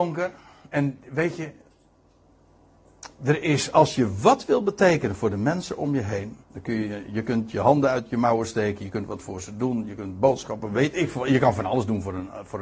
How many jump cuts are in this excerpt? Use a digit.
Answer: 1